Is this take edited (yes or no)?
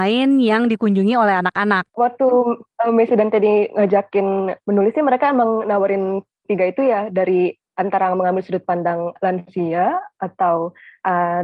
yes